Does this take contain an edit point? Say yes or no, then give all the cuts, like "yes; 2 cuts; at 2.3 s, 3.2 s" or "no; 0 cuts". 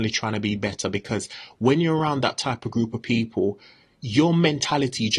no; 0 cuts